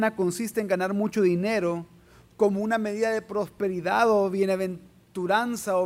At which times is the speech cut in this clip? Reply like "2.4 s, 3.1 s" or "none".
none